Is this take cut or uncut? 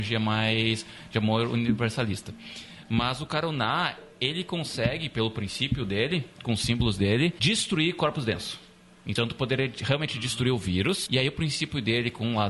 uncut